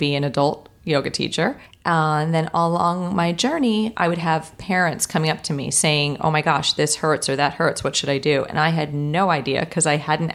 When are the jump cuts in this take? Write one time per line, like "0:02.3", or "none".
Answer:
0:01.7

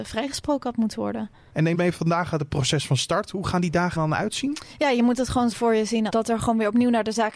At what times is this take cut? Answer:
0:01.7
0:04.0
0:05.5
0:06.1

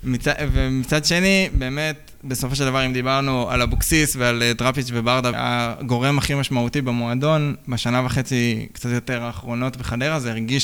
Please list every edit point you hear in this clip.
0:05.3

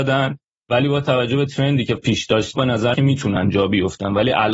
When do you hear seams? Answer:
0:02.0
0:02.5
0:02.9

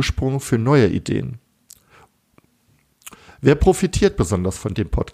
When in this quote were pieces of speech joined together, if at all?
none

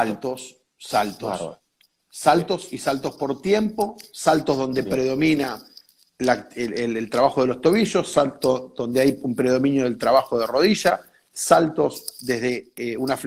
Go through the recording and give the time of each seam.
none

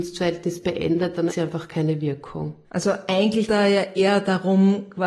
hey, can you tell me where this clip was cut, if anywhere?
0:01.3
0:02.6
0:03.5
0:04.0

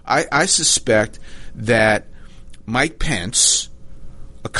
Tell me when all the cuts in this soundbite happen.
none

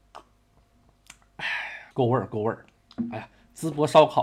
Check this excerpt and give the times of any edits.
0:01.9

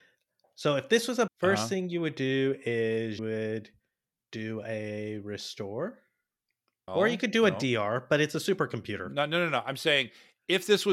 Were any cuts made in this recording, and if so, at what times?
0:01.3
0:03.2
0:06.9

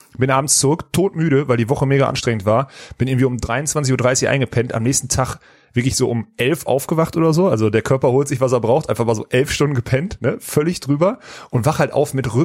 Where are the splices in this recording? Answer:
none

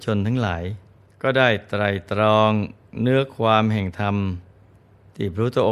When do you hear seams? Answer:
0:01.0

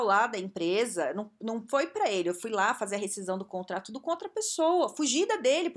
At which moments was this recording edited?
none

